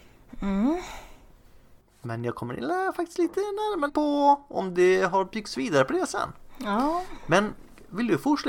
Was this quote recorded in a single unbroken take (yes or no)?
no